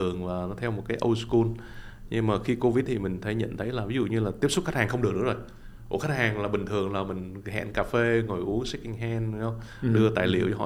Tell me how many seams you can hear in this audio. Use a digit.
1